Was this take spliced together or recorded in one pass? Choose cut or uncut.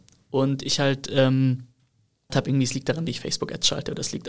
cut